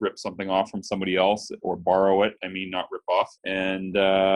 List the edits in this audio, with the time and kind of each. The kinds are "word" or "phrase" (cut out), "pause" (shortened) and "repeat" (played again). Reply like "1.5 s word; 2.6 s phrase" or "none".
3.4 s pause